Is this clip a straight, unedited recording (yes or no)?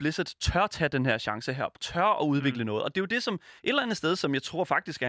no